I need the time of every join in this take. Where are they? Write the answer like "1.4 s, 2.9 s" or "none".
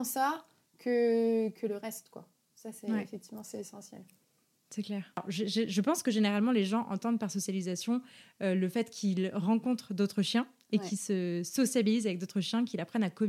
none